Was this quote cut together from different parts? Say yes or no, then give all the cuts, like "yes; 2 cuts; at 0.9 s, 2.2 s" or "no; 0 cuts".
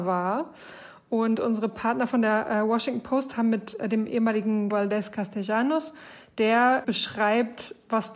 yes; 1 cut; at 4.7 s